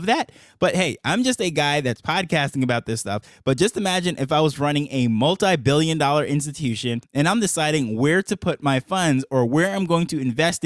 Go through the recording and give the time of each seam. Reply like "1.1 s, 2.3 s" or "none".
7.0 s